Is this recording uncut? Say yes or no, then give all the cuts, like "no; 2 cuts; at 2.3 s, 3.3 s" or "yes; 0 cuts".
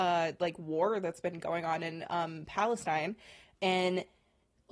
yes; 0 cuts